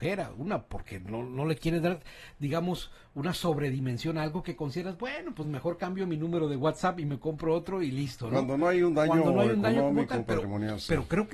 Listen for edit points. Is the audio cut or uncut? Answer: uncut